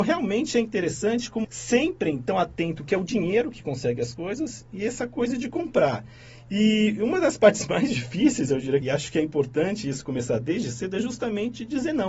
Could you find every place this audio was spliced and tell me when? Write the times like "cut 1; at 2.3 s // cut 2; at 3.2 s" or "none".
cut 1; at 1.4 s // cut 2; at 8.8 s

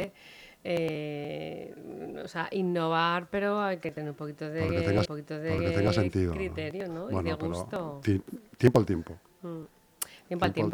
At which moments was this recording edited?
cut 1; at 5.1 s

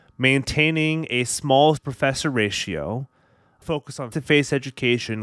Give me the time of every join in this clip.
cut 1; at 1.8 s // cut 2; at 3.6 s // cut 3; at 4.1 s

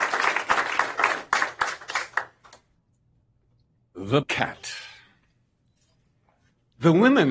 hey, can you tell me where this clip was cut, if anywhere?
cut 1; at 4.2 s

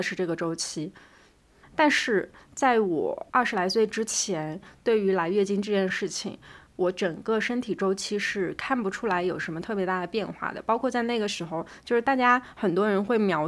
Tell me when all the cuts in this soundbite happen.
none

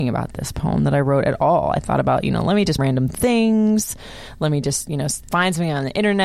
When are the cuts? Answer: cut 1; at 2.8 s

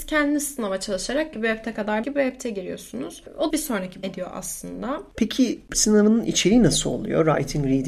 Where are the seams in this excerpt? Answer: cut 1; at 1.3 s // cut 2; at 2.0 s // cut 3; at 3.5 s // cut 4; at 4.0 s // cut 5; at 5.7 s

